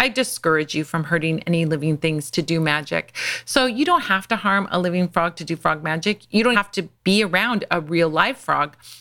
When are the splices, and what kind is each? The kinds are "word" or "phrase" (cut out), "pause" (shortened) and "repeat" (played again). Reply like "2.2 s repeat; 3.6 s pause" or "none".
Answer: 6.5 s word; 6.9 s pause